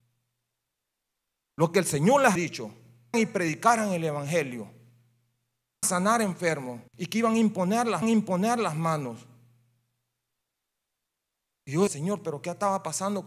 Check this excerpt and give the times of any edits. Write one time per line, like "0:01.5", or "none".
0:02.4
0:03.1
0:05.8
0:06.9
0:08.0
0:11.9